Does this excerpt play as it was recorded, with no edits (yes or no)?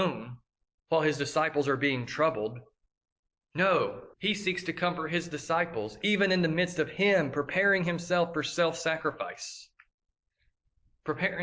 no